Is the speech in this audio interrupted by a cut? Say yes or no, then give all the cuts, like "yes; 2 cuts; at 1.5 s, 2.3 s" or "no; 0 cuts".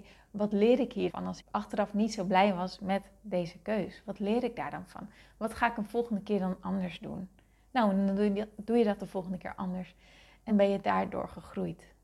yes; 3 cuts; at 1.1 s, 1.4 s, 10.5 s